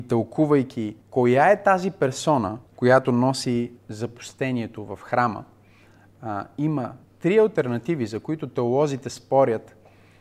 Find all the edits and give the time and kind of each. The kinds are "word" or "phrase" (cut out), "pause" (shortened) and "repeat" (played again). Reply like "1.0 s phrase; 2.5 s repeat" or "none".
1.0 s pause; 2.7 s pause; 3.8 s pause; 7.0 s pause